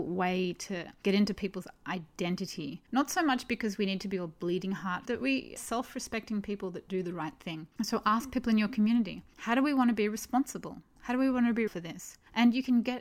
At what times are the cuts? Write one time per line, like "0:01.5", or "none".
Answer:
0:05.0
0:05.6
0:07.7
0:11.7